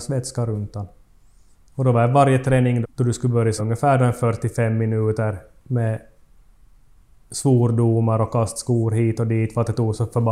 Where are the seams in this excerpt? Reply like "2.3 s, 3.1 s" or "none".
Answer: 2.8 s, 3.6 s